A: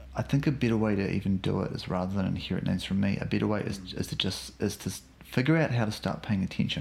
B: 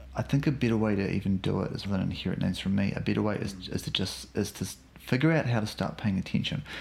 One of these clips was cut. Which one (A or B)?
B